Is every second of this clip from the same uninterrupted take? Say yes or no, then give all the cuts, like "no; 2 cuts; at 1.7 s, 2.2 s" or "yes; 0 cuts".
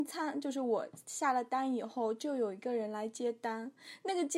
yes; 0 cuts